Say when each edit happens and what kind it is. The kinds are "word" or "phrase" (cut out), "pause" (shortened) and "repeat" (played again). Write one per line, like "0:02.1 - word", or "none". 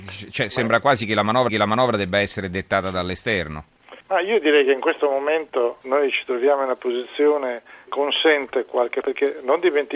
0:01.5 - repeat
0:04.0 - pause
0:05.8 - word
0:07.9 - word
0:09.0 - word